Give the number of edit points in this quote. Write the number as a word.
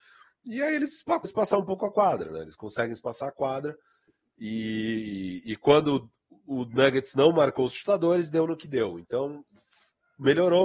one